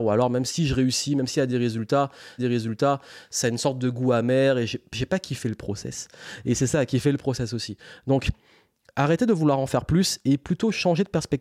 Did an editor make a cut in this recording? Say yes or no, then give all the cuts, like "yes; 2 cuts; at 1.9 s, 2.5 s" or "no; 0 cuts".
yes; 1 cut; at 2.4 s